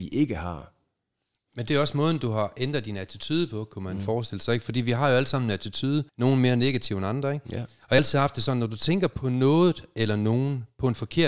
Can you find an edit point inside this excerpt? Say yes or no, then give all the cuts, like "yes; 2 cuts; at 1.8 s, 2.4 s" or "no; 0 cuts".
yes; 2 cuts; at 6.1 s, 8.0 s